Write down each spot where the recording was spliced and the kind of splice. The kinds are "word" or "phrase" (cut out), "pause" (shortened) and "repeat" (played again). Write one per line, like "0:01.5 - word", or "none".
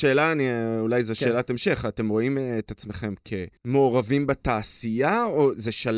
0:03.6 - pause